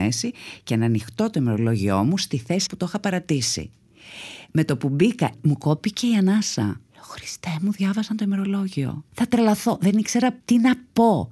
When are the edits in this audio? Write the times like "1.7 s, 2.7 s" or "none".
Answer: 2.7 s, 6.9 s, 9.1 s